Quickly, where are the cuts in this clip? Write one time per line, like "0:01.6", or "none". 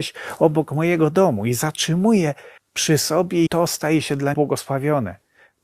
0:02.6
0:03.5
0:04.3